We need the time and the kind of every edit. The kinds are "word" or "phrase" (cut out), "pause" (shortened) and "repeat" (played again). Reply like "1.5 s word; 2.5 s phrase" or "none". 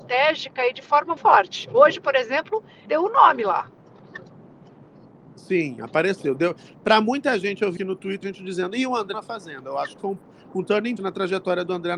1.2 s word; 2.9 s word; 7.8 s word; 8.2 s word; 9.1 s word; 10.0 s word; 11.0 s word